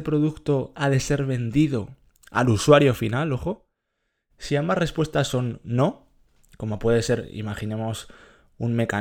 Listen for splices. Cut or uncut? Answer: uncut